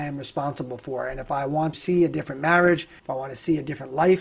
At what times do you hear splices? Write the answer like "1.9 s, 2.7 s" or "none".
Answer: 1.7 s, 3.0 s